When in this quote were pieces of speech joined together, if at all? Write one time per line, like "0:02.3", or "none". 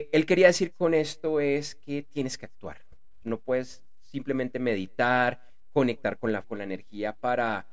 0:03.2
0:06.4